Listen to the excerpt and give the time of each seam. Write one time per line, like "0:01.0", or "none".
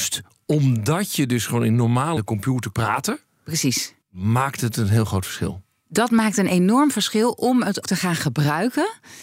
0:02.2
0:02.7
0:04.0
0:07.8